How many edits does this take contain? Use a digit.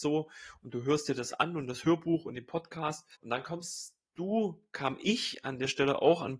1